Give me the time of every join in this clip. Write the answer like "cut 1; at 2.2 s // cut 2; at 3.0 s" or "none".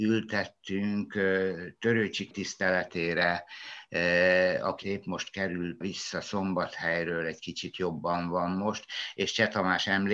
cut 1; at 2.3 s // cut 2; at 4.8 s // cut 3; at 5.8 s